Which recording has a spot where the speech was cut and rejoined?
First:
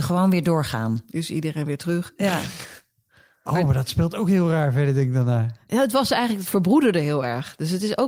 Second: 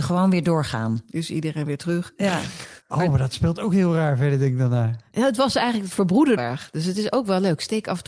second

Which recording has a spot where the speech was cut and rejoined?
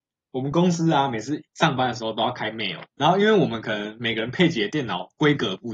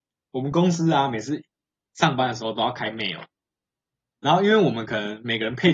first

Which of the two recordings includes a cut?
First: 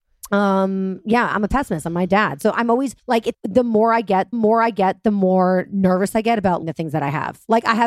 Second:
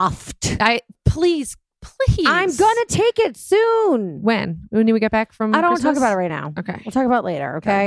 first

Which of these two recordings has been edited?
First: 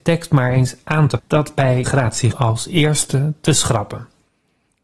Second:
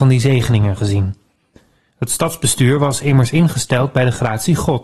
first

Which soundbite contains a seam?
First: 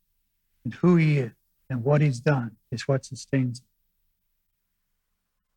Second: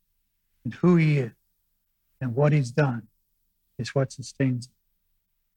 first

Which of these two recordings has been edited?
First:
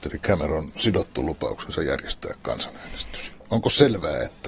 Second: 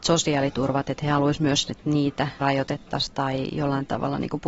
second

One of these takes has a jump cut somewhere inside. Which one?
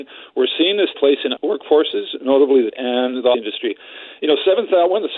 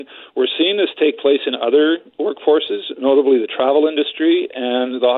first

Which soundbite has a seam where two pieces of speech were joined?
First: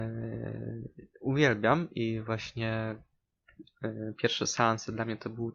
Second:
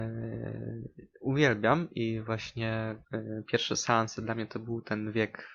second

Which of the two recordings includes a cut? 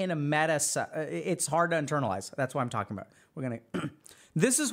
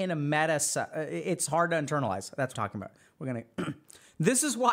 second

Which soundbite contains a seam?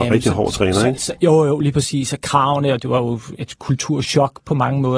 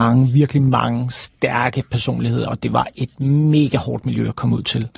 first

